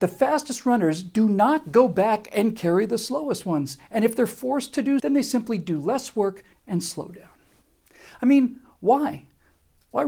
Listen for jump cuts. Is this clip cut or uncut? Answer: cut